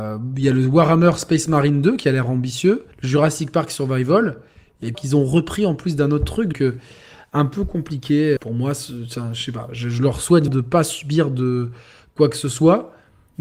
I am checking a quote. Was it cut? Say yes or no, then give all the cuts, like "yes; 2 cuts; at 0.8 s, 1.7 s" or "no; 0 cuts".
yes; 5 cuts; at 2.9 s, 4.9 s, 6.5 s, 8.4 s, 10.5 s